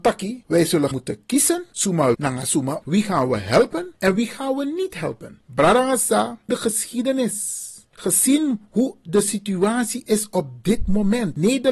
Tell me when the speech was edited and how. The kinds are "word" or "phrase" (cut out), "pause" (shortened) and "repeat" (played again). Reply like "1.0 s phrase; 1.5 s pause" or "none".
0.9 s word; 2.1 s word; 2.8 s word; 6.5 s word